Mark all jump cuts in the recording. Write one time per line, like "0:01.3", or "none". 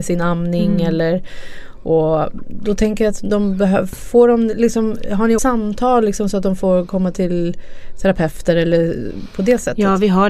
0:05.4